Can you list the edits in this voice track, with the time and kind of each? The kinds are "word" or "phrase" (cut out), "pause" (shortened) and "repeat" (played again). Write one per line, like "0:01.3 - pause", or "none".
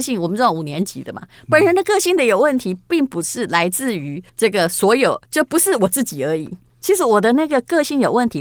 0:04.3 - pause
0:05.2 - pause